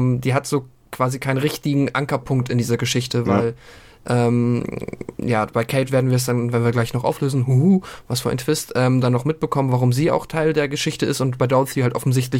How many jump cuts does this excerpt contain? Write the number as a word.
zero